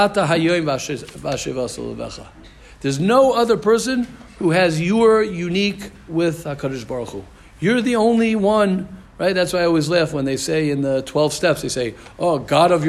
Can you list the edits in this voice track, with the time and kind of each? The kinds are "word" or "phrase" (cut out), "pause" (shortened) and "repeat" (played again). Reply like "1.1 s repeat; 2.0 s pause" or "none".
6.1 s word